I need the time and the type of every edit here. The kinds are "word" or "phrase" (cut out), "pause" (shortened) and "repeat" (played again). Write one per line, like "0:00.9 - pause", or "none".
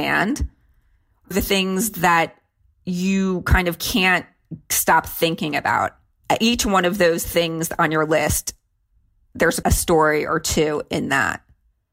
0:01.3 - word
0:09.6 - word